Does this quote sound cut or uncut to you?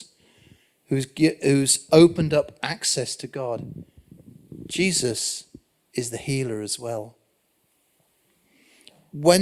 uncut